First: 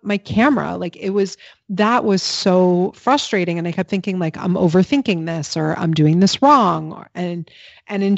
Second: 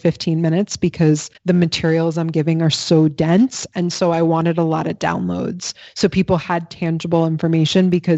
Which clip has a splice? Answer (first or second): second